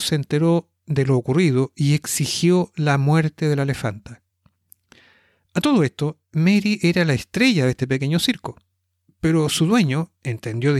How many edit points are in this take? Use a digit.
0